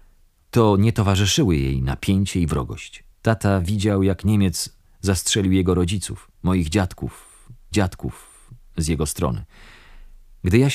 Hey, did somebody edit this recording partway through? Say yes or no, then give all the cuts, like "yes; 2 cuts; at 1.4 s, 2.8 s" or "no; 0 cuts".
yes; 3 cuts; at 3.1 s, 6.3 s, 7.7 s